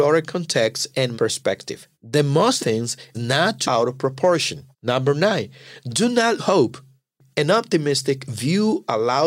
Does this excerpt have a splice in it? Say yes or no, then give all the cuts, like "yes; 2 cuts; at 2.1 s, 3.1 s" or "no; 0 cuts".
yes; 7 cuts; at 1.1 s, 1.9 s, 2.6 s, 3.1 s, 3.6 s, 4.7 s, 6.4 s